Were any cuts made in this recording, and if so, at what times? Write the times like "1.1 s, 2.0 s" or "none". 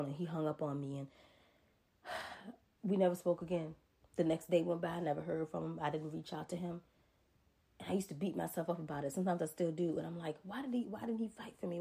none

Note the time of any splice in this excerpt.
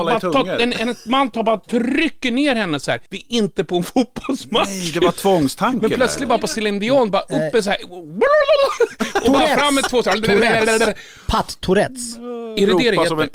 3.1 s

